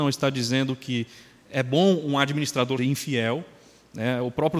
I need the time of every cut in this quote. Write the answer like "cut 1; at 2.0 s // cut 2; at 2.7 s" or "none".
cut 1; at 1.5 s // cut 2; at 2.8 s